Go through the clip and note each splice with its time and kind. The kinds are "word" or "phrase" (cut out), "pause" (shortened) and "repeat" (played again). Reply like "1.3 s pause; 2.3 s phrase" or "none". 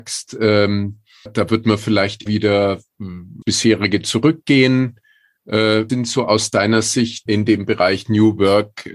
1.3 s word; 2.3 s word; 3.4 s word; 5.9 s word; 7.3 s word